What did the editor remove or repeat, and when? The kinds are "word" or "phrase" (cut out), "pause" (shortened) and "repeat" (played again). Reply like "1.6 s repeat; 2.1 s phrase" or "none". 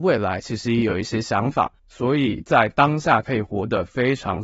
1.8 s pause